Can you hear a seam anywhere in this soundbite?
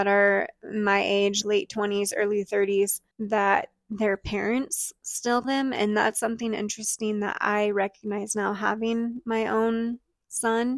yes; 3 cuts; at 1.4 s, 3.1 s, 5.4 s

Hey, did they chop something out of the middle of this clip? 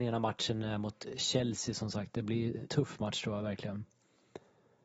yes; 1 cut; at 2.7 s

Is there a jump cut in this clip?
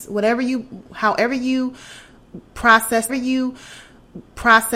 yes; 1 cut; at 3.1 s

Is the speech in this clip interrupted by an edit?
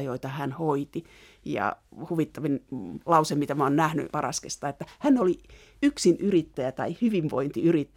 yes; 1 cut; at 4.1 s

